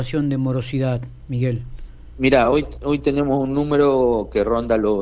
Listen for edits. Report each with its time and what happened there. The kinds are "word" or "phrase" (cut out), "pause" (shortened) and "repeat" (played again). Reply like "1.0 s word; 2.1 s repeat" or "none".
none